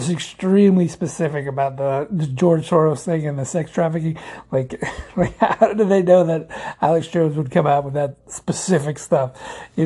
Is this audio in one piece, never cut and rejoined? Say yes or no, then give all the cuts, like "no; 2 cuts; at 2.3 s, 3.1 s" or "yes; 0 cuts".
no; 1 cut; at 8.2 s